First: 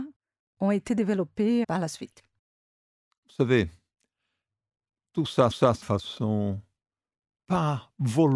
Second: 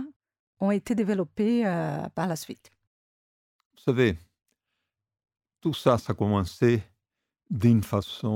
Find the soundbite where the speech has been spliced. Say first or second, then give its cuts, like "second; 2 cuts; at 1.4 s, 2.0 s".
first; 3 cuts; at 1.6 s, 5.5 s, 5.8 s